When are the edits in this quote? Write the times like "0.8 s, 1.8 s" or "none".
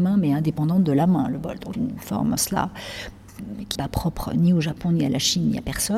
1.7 s, 2.4 s, 3.8 s